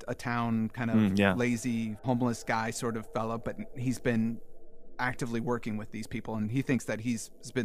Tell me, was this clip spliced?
no; 0 cuts

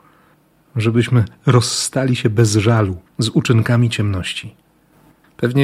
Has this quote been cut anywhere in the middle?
yes; 1 cut; at 3.1 s

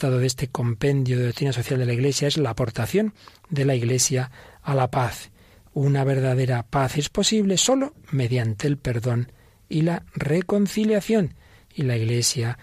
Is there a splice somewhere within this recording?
no; 0 cuts

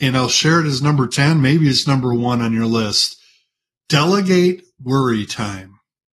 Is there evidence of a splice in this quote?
no; 0 cuts

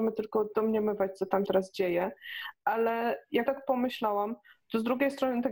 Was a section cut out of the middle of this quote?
yes; 2 cuts; at 1.5 s, 3.5 s

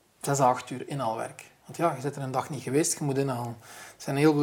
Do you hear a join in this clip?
no; 0 cuts

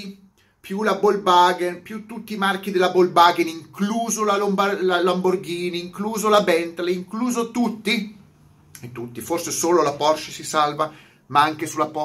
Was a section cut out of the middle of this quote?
no; 0 cuts

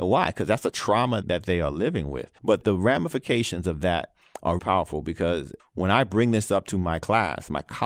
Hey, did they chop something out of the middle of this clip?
yes; 3 cuts; at 1.2 s, 2.4 s, 4.6 s

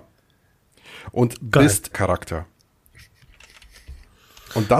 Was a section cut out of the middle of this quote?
yes; 1 cut; at 1.9 s

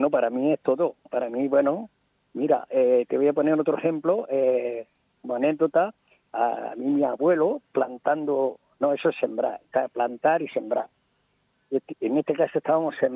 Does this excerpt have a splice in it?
no; 0 cuts

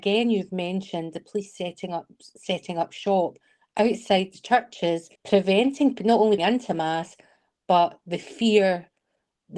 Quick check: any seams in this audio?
yes; 2 cuts; at 5.2 s, 6.4 s

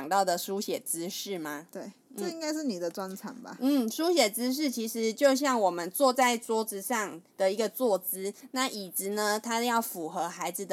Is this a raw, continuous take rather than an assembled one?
no; 1 cut; at 7.3 s

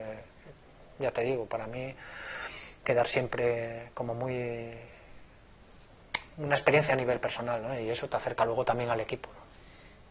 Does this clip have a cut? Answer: yes; 2 cuts; at 2.8 s, 6.9 s

